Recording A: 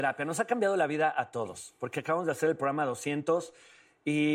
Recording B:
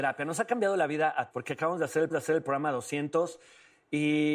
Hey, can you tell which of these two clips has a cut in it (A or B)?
B